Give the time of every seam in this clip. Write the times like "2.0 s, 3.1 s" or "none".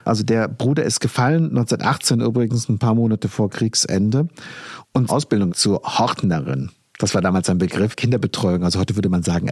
5.1 s, 5.5 s, 7.9 s